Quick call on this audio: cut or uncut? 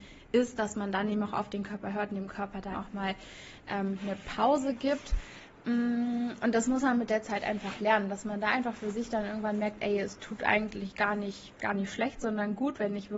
cut